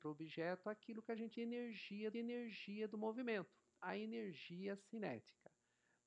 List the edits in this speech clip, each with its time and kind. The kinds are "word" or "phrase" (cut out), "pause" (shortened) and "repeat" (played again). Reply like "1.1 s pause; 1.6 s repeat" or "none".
1.3 s word; 2.1 s repeat